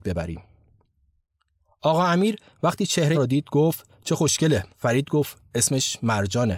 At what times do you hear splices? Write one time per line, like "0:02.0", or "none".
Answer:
0:03.1
0:04.7